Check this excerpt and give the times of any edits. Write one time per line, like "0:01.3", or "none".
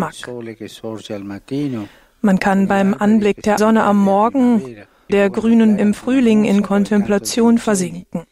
0:03.6
0:05.1
0:05.8

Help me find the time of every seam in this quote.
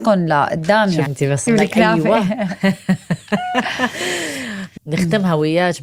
0:01.1
0:01.5
0:04.8

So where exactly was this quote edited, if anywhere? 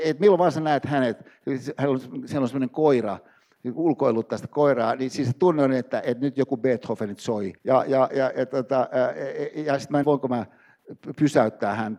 0:07.6
0:08.1
0:10.0

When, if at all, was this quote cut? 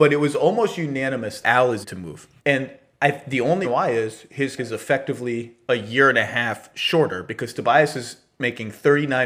0:01.4
0:01.8
0:02.4
0:03.6
0:04.6

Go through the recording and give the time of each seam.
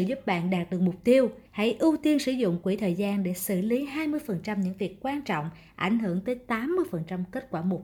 0:01.5

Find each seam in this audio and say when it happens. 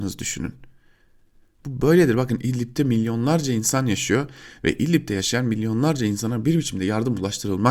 none

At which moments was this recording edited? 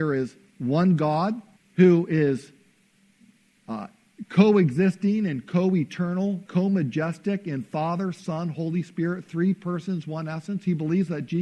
0:01.6
0:06.5

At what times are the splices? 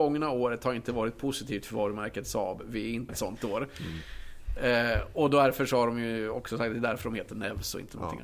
0:03.1

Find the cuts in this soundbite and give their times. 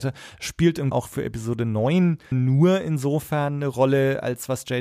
0:00.9
0:02.3

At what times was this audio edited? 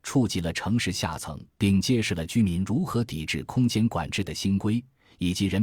0:01.5

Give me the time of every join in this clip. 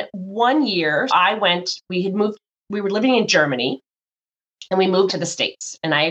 0:01.1
0:05.1

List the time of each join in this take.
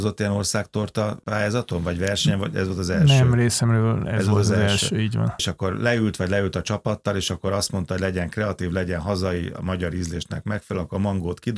none

